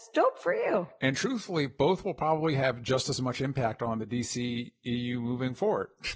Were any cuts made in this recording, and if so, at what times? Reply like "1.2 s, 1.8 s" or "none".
none